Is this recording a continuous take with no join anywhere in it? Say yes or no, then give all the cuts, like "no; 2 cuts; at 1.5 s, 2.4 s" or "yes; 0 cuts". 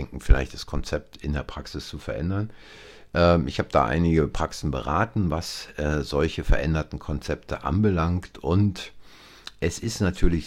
yes; 0 cuts